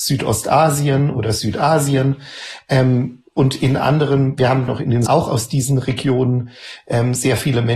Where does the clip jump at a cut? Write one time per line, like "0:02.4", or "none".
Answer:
0:04.7
0:05.1